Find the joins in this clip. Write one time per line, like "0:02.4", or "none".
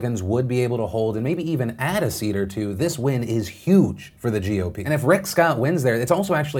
none